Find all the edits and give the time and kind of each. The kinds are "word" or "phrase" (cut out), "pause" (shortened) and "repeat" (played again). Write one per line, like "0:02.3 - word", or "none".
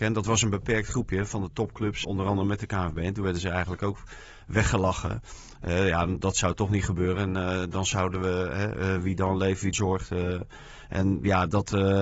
0:02.0 - word
0:09.7 - word